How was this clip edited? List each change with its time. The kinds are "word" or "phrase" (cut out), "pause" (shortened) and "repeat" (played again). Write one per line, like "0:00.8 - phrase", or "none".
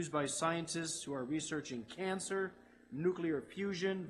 none

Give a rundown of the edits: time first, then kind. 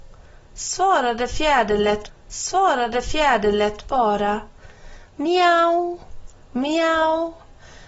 0:02.1 - repeat

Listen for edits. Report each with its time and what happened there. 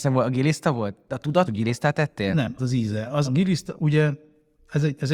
0:01.5 - phrase
0:02.6 - phrase
0:03.2 - word

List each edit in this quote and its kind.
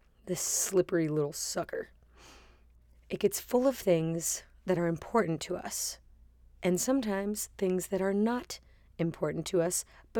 none

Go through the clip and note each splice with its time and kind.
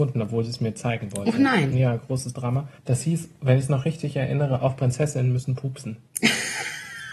0:02.8 - pause

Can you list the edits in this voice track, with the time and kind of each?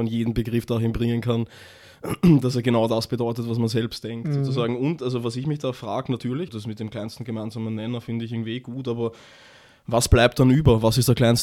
0:06.5 - word

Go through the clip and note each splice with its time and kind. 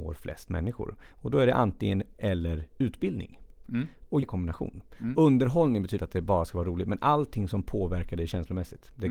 0:02.1 - word
0:04.2 - word
0:06.0 - word

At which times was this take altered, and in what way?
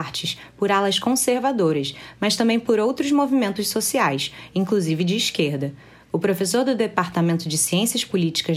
none

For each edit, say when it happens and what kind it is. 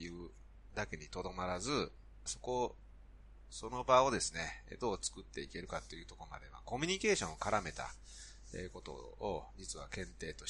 0:02.3 - phrase

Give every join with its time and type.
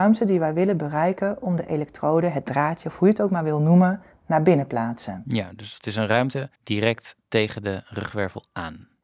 0:06.5 - pause

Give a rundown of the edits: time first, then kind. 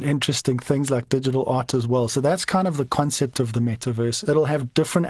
none

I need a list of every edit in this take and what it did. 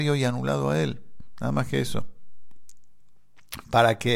none

